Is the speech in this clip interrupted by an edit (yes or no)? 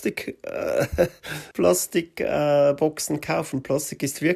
yes